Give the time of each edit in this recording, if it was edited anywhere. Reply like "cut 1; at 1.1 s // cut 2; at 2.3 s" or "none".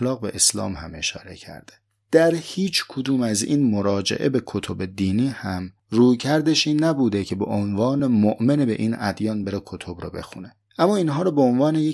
none